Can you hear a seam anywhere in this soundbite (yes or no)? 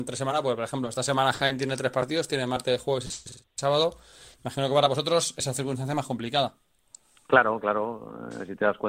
no